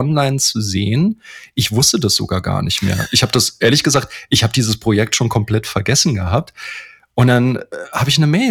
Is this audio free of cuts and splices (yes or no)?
yes